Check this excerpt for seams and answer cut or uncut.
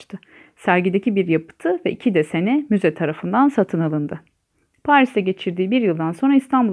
uncut